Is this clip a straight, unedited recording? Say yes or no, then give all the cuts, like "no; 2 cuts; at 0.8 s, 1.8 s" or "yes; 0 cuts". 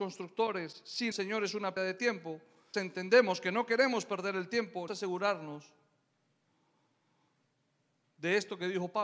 no; 4 cuts; at 1.1 s, 1.8 s, 2.7 s, 4.9 s